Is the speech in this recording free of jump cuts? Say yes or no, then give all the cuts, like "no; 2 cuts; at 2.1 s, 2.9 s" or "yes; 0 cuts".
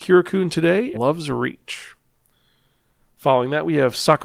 no; 1 cut; at 0.9 s